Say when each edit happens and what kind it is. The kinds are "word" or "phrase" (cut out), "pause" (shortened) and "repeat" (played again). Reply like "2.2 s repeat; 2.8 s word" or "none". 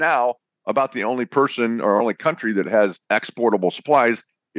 3.0 s pause